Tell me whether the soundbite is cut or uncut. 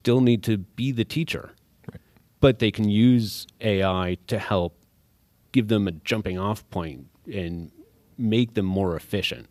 cut